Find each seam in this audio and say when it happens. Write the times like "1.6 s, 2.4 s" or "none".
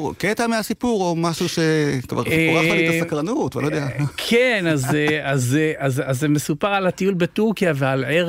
none